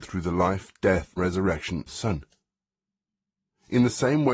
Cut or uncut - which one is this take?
cut